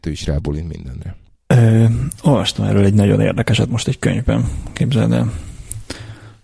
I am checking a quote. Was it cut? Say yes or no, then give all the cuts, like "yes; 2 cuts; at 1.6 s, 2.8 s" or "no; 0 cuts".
no; 0 cuts